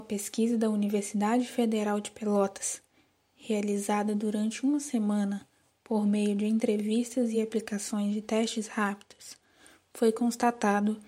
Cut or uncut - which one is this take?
uncut